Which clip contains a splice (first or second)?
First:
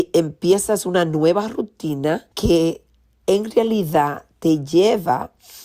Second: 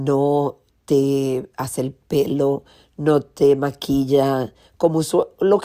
first